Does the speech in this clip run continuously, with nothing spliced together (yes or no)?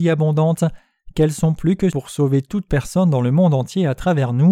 no